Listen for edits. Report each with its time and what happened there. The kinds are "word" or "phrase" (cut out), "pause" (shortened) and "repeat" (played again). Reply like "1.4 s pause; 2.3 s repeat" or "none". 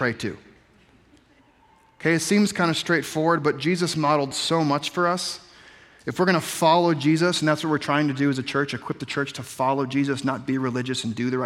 none

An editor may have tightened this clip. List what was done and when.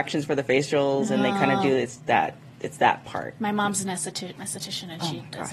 4.4 s word

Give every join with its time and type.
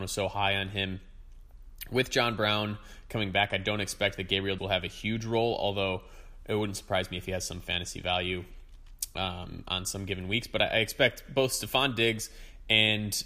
4.6 s word

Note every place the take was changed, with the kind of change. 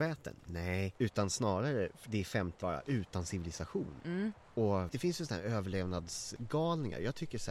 2.0 s word; 2.6 s word; 4.9 s word

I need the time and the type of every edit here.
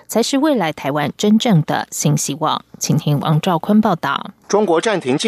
4.4 s pause

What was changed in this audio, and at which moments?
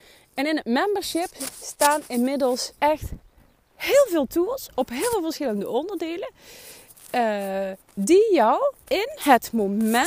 2.8 s pause; 8.8 s pause

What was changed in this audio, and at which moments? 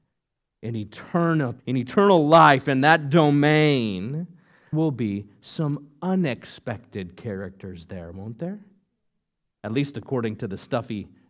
1.6 s pause; 4.7 s word

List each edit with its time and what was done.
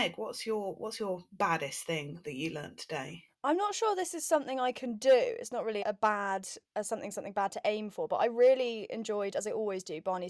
5.8 s word

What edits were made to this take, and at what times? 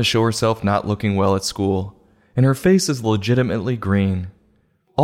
none

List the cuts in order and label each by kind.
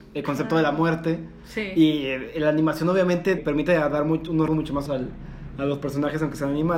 3.4 s word; 4.5 s word; 4.9 s word

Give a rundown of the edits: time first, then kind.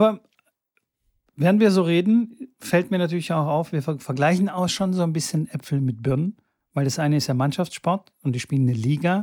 none

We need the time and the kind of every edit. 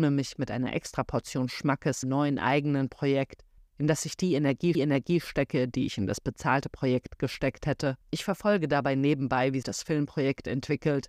2.0 s word; 3.6 s pause; 4.7 s repeat; 8.0 s pause; 9.6 s word

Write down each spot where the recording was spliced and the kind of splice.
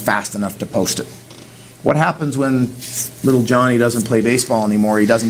none

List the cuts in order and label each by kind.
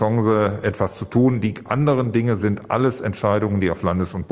none

